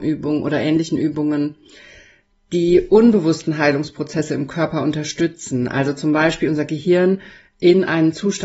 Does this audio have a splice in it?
no; 0 cuts

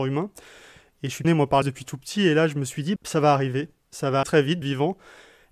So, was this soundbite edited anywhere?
yes; 5 cuts; at 1.2 s, 1.6 s, 3.0 s, 4.2 s, 4.6 s

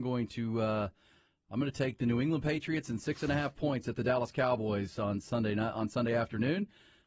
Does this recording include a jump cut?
no; 0 cuts

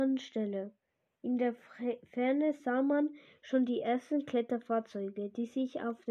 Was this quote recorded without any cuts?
yes; 0 cuts

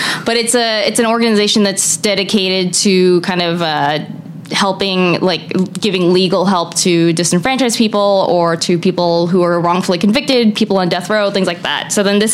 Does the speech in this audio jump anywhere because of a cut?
no; 0 cuts

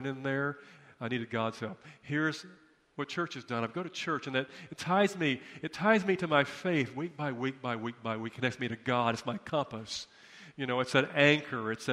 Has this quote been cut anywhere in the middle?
no; 0 cuts

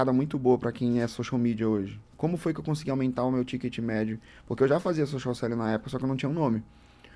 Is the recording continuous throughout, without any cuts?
yes; 0 cuts

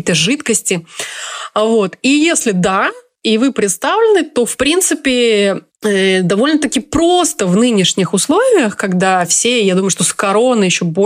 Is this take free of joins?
yes; 0 cuts

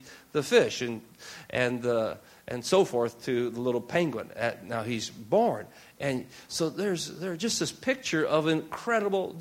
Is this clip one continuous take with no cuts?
yes; 0 cuts

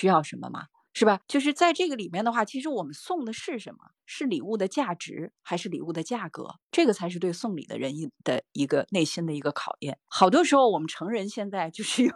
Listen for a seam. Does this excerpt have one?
no; 0 cuts

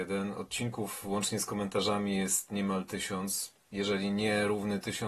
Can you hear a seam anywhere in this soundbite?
yes; 1 cut; at 3.6 s

